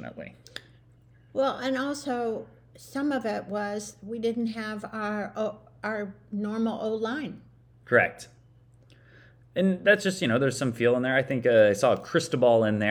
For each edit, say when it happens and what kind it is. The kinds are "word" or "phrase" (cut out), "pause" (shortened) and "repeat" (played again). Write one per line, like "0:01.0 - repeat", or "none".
none